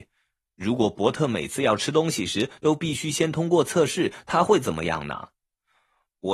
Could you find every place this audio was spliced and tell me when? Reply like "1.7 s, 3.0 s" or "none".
none